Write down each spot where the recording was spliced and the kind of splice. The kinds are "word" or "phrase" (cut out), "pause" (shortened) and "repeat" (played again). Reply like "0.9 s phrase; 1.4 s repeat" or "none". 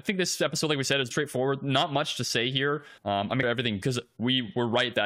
1.1 s word; 3.0 s pause; 3.4 s phrase; 3.8 s word